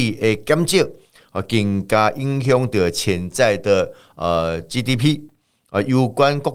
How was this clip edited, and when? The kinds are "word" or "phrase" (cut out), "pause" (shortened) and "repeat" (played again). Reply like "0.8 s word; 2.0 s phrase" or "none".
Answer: none